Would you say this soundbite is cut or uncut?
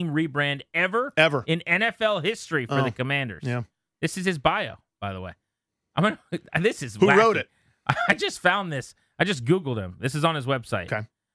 uncut